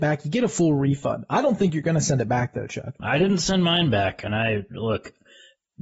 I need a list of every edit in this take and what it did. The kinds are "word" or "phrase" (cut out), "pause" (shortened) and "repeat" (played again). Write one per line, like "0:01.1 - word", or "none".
0:03.0 - word